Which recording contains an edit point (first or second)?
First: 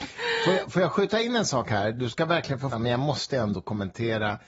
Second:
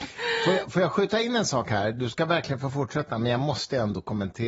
first